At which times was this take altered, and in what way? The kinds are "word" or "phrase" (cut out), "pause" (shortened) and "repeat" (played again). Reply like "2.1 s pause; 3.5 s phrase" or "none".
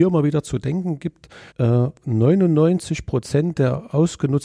1.5 s pause